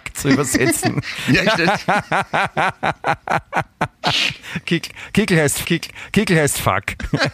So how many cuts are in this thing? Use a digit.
1